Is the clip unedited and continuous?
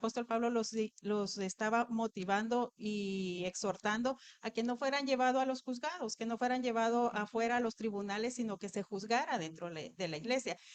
yes; 0 cuts

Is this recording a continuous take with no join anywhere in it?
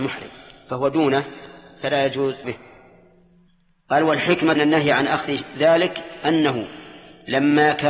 no; 3 cuts; at 2.4 s, 3.5 s, 4.6 s

